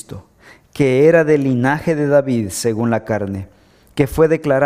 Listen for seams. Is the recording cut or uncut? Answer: uncut